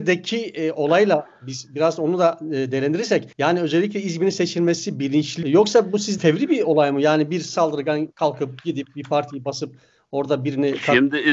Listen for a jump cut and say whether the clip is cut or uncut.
cut